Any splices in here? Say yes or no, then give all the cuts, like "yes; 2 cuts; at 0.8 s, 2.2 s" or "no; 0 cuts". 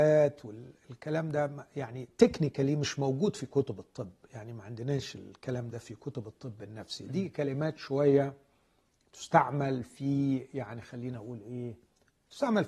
no; 0 cuts